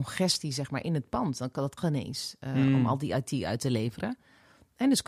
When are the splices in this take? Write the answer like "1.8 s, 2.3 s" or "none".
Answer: 1.8 s